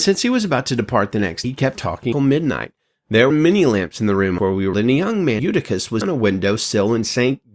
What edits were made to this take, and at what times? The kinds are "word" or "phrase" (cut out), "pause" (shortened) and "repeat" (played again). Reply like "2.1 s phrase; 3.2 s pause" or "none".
1.4 s word; 1.8 s word; 2.1 s word; 3.3 s word; 4.4 s word; 4.7 s word; 5.4 s word; 6.0 s word